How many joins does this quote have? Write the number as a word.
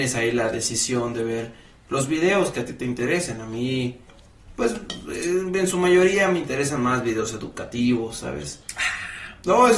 zero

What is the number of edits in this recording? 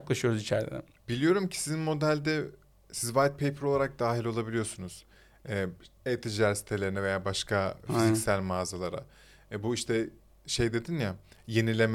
zero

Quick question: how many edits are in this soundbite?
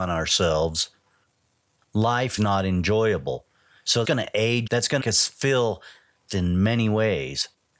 five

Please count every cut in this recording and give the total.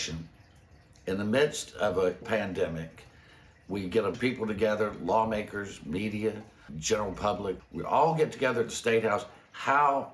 five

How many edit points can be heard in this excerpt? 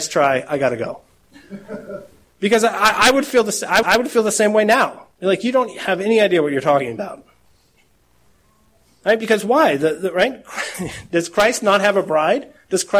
one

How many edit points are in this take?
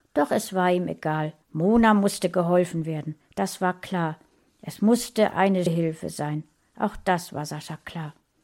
two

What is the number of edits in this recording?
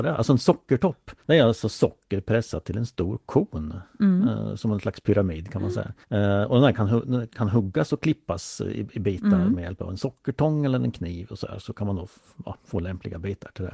two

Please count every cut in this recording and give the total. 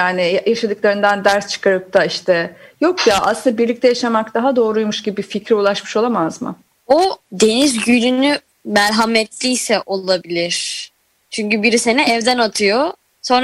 zero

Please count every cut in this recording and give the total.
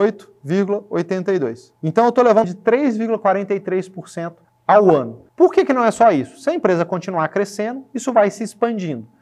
four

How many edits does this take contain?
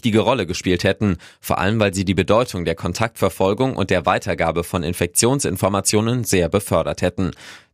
zero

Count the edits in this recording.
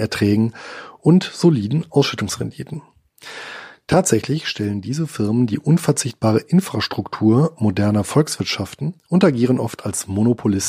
one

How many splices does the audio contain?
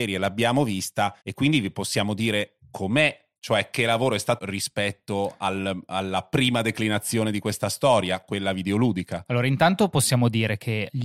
three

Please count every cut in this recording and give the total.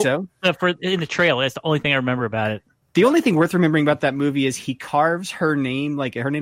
zero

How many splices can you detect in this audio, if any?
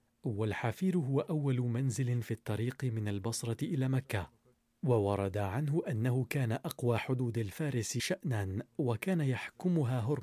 two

